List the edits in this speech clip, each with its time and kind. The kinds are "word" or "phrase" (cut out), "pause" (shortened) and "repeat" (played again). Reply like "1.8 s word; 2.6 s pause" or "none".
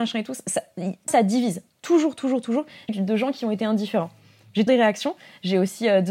1.1 s word; 2.9 s word; 4.7 s word